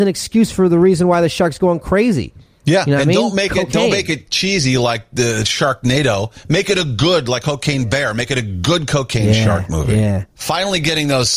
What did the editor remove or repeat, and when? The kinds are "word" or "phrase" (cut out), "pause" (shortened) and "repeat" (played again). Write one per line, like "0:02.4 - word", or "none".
0:10.3 - pause